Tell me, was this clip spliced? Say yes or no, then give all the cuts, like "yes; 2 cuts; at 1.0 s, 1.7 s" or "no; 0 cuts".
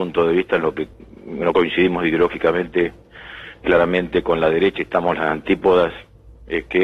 no; 0 cuts